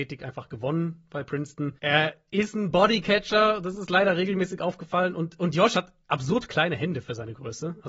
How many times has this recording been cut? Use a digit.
2